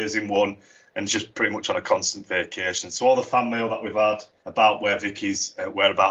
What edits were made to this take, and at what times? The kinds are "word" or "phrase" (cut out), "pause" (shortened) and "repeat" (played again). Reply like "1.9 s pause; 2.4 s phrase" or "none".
none